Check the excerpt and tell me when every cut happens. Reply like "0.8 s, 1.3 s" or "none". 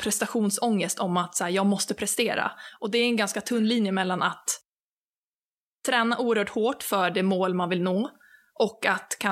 none